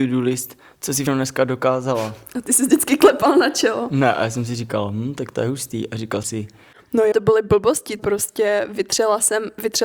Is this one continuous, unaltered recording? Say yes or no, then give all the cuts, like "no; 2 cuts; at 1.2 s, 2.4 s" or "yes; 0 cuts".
no; 4 cuts; at 1.1 s, 6.2 s, 7.1 s, 8.0 s